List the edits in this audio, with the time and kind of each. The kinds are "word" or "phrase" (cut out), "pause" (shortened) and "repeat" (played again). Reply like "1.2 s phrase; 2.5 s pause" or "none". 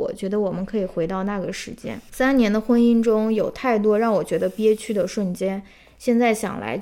none